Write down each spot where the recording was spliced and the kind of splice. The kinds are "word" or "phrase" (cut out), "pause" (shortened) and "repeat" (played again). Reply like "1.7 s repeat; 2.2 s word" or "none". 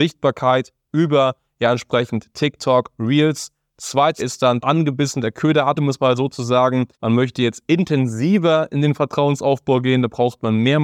4.2 s word; 4.6 s phrase; 5.8 s word; 6.9 s pause